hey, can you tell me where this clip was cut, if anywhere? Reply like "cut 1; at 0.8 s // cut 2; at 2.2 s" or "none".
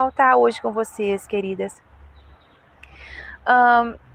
cut 1; at 1.3 s